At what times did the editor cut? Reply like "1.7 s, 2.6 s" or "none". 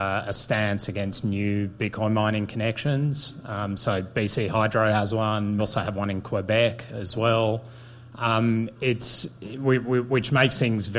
5.6 s

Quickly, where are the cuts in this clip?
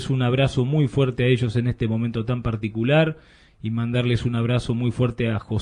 none

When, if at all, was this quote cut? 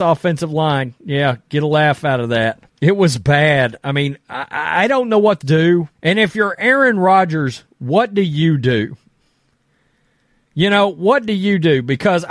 2.7 s, 5.4 s, 5.9 s

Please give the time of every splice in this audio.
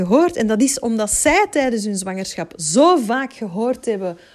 none

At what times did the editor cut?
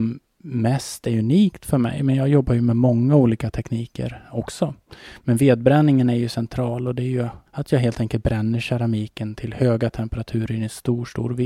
7.5 s

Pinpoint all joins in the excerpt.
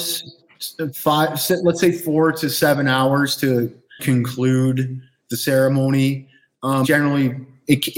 4.0 s, 6.8 s

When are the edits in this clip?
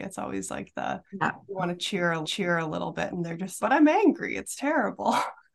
1.1 s, 2.2 s, 3.6 s

